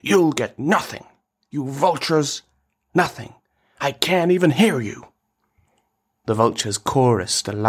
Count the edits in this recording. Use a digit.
0